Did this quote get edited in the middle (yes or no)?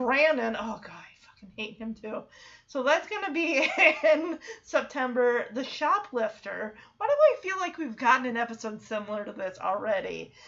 no